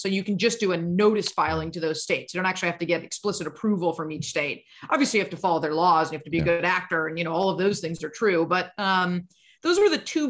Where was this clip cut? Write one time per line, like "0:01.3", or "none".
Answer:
none